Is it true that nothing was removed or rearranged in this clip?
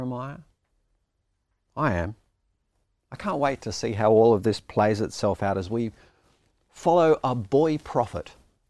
yes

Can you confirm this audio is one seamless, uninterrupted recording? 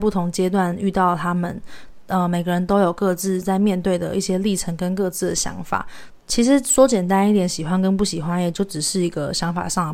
yes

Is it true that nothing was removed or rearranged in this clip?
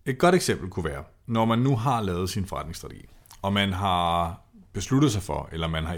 yes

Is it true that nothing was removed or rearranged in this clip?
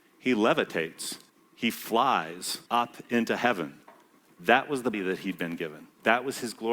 no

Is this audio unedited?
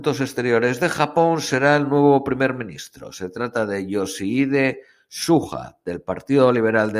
yes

